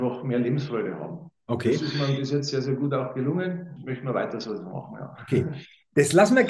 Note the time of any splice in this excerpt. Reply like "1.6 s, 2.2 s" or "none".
3.8 s